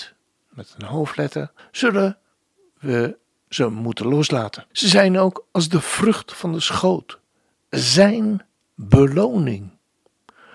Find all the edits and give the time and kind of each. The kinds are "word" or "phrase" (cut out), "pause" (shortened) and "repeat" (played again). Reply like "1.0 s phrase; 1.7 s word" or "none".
1.6 s pause; 4.7 s pause